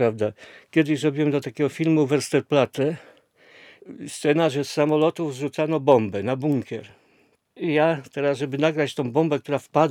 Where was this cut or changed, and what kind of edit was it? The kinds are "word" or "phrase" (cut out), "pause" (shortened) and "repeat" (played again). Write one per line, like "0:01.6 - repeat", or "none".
none